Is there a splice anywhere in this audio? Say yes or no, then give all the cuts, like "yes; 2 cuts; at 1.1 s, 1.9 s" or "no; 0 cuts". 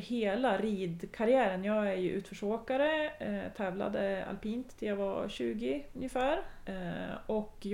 no; 0 cuts